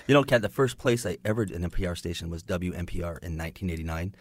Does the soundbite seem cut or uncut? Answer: cut